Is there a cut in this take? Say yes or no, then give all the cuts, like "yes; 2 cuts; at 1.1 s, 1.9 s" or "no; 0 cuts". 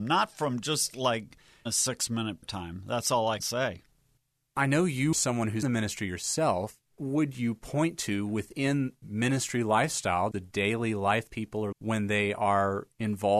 yes; 9 cuts; at 2.4 s, 3.4 s, 5.1 s, 5.6 s, 7.0 s, 9.0 s, 10.3 s, 11.3 s, 11.7 s